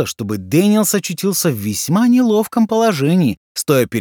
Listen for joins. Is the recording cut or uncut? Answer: uncut